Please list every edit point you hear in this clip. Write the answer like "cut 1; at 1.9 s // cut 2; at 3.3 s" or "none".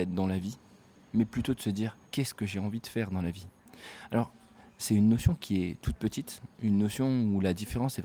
cut 1; at 2.1 s // cut 2; at 6.5 s